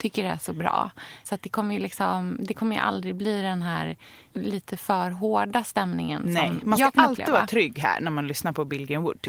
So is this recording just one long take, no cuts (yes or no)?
yes